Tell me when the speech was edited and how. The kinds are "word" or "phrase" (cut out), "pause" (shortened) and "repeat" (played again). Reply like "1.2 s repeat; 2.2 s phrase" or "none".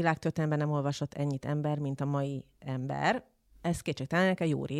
none